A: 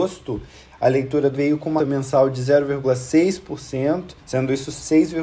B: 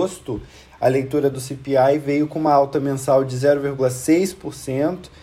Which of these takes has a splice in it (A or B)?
A